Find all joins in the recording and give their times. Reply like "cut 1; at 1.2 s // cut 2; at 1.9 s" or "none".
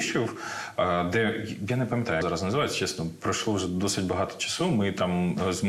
cut 1; at 2.2 s